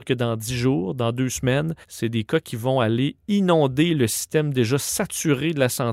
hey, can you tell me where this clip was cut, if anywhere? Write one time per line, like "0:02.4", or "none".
0:01.8